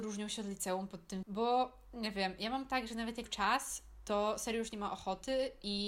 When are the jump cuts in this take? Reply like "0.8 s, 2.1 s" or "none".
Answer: 1.2 s, 3.3 s